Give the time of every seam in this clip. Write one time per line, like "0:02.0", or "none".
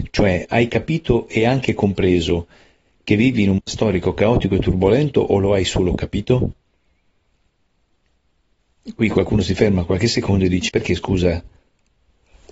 0:03.6
0:10.7